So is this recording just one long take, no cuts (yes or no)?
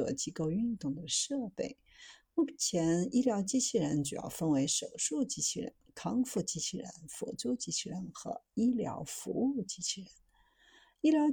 yes